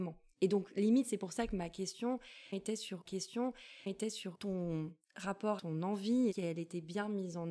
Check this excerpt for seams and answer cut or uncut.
cut